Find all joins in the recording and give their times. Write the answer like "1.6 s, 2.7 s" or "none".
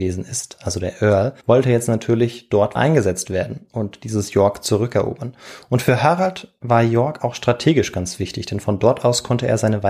1.4 s, 2.8 s